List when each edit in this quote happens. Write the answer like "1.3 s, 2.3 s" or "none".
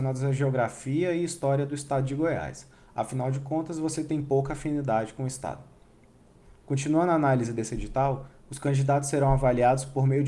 none

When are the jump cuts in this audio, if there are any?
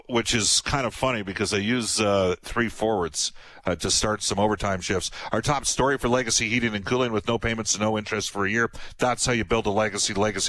none

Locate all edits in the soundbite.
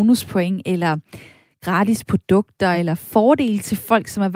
none

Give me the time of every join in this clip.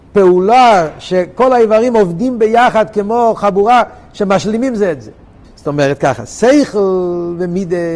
5.4 s

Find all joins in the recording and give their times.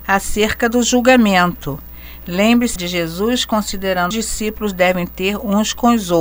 2.8 s, 4.1 s

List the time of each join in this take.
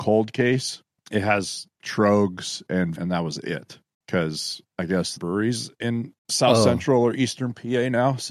1.0 s, 1.7 s, 3.0 s, 3.9 s, 5.2 s, 6.2 s

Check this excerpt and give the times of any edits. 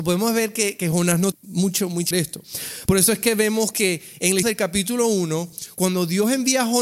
1.3 s, 2.1 s, 4.4 s

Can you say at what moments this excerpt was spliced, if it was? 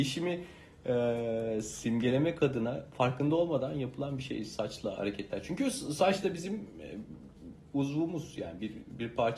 5.0 s

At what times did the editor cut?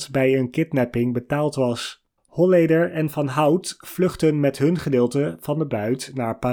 2.2 s

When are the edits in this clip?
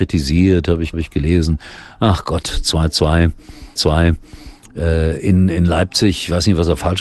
0.9 s, 3.8 s

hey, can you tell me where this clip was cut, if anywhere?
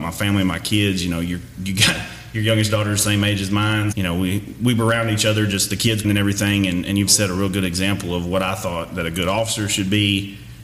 3.9 s, 6.0 s, 7.1 s

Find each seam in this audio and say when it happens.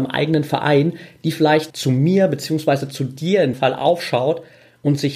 1.7 s, 3.5 s

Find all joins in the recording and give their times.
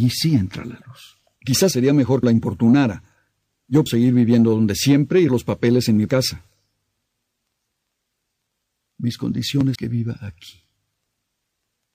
1.7 s, 2.2 s, 3.9 s, 5.3 s, 6.1 s, 9.7 s

